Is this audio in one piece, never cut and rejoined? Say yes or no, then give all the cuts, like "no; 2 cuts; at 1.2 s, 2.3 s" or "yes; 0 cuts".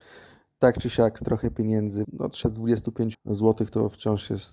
no; 3 cuts; at 2.0 s, 2.4 s, 3.1 s